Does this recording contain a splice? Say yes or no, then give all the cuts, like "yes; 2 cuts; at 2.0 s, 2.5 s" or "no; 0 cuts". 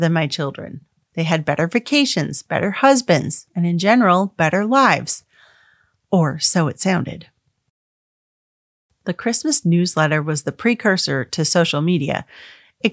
no; 0 cuts